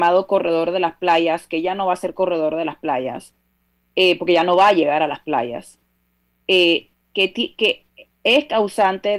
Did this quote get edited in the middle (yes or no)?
no